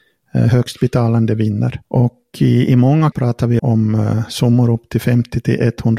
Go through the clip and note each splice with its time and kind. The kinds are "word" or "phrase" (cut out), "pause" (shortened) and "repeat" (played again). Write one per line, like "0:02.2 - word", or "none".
0:01.8 - pause
0:03.1 - word
0:03.6 - word